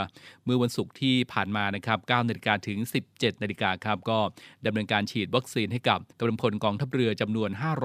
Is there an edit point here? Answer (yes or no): yes